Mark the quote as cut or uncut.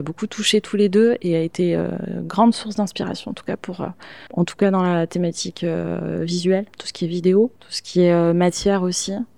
cut